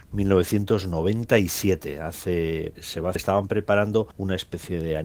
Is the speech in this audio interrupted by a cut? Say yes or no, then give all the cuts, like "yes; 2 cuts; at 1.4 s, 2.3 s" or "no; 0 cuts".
yes; 3 cuts; at 2.8 s, 3.2 s, 4.1 s